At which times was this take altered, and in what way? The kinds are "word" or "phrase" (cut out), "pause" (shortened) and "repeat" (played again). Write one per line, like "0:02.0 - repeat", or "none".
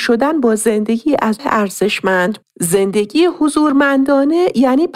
0:01.4 - word
0:02.4 - word